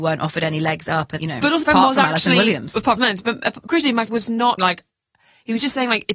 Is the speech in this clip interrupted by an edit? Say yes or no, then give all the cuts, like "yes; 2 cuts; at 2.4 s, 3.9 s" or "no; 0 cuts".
yes; 6 cuts; at 1.2 s, 1.6 s, 3.0 s, 3.7 s, 4.1 s, 4.6 s